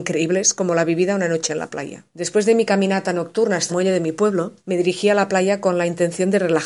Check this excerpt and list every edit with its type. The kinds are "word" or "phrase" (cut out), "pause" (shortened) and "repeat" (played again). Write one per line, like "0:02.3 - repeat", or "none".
0:02.1 - pause
0:03.7 - word
0:04.6 - pause